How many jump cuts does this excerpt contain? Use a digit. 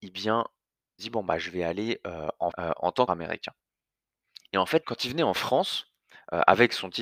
4